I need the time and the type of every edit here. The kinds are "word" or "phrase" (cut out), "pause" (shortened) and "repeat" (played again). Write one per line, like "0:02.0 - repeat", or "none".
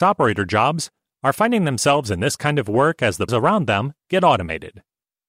0:03.3 - word